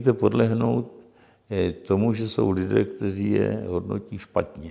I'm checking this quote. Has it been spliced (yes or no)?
no